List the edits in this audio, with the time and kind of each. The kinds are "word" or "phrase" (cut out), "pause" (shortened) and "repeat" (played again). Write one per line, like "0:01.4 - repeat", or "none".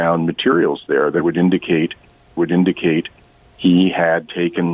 0:02.4 - repeat

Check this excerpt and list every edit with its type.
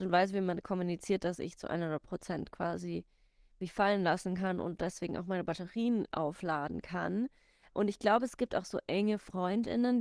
none

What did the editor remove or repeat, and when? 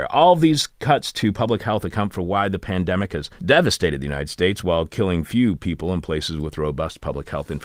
0:03.4 - pause

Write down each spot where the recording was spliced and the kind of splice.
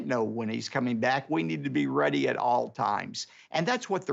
none

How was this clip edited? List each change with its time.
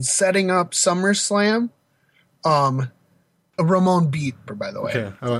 0:03.6 - phrase
0:04.5 - word

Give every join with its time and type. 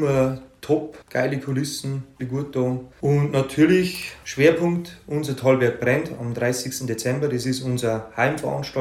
0:01.0 - pause
0:02.2 - word
0:02.9 - pause

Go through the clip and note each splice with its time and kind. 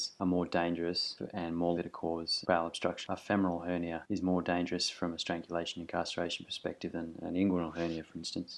0:01.8 - word
0:03.1 - word

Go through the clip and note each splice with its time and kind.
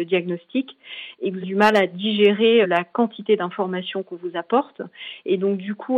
0:01.4 - word
0:02.6 - word

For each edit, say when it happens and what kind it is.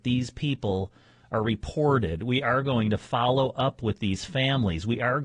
none

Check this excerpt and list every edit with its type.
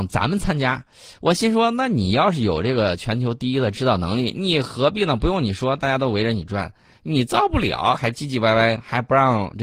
none

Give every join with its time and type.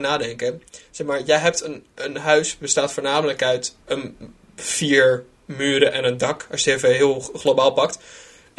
0:03.8 - pause

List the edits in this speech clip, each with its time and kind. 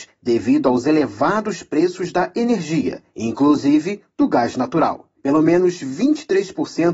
none

